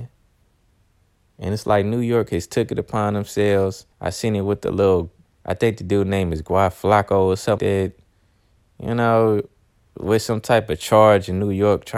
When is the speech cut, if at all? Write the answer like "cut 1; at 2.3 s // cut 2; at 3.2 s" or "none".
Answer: cut 1; at 3.9 s // cut 2; at 5.2 s // cut 3; at 7.6 s